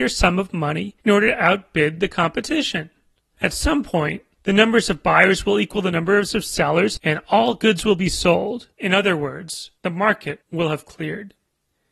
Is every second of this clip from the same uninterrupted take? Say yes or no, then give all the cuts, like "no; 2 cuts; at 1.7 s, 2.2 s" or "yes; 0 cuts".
no; 4 cuts; at 1.0 s, 8.7 s, 9.8 s, 10.4 s